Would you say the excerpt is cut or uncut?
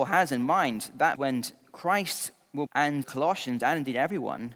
cut